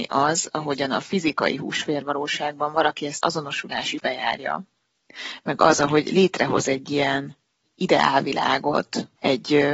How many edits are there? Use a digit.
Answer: 2